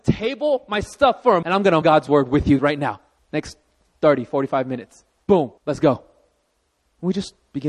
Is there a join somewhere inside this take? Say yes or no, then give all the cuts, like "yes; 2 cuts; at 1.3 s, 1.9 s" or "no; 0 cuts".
yes; 5 cuts; at 1.4 s, 1.8 s, 2.6 s, 3.2 s, 5.6 s